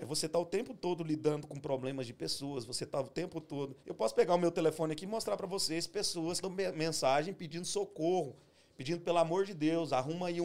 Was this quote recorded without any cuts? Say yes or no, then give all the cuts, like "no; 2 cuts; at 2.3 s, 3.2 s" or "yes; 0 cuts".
no; 2 cuts; at 3.8 s, 6.4 s